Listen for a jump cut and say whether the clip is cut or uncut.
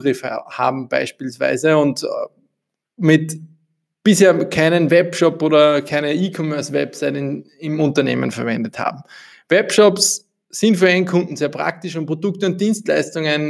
uncut